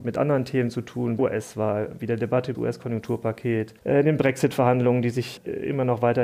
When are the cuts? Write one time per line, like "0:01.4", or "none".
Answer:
0:01.2
0:02.5
0:03.8